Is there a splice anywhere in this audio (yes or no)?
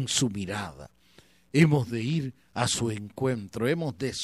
no